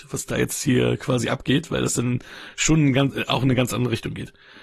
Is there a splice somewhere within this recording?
no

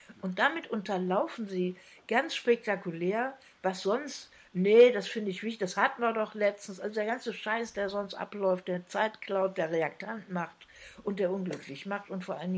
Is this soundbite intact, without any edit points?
yes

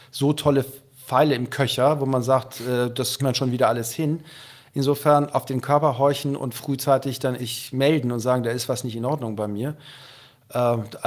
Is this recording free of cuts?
no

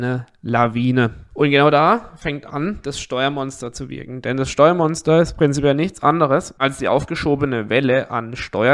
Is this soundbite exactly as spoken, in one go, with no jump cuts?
yes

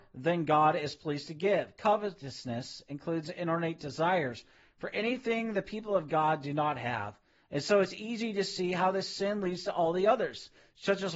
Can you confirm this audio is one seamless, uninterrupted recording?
yes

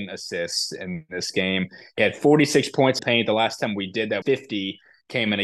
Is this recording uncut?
no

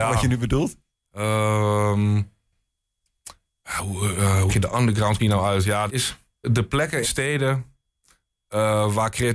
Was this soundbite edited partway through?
yes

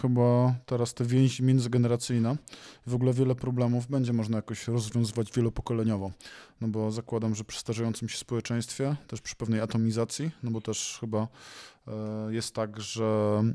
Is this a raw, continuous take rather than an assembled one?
yes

